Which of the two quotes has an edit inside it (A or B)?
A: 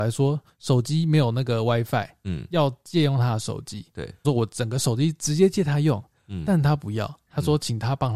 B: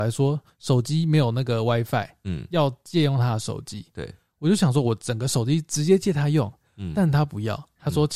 A